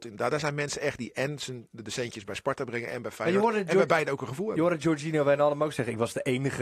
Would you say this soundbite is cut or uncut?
uncut